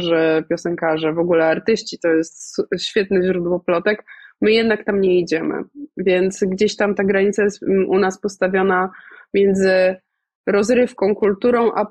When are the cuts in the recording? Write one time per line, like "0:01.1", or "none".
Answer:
none